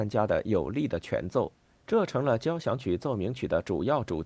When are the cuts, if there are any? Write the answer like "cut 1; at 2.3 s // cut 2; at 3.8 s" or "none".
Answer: cut 1; at 1.7 s